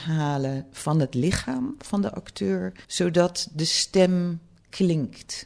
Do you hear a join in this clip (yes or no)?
yes